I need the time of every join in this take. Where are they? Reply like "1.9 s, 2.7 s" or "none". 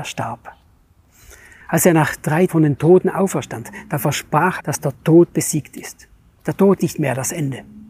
2.5 s, 4.6 s, 6.8 s